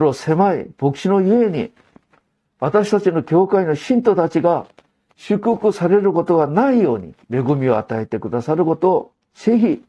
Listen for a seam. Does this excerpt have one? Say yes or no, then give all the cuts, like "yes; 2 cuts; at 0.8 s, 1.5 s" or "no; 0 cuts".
yes; 1 cut; at 7.2 s